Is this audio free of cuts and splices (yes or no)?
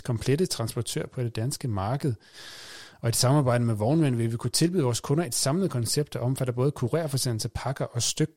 yes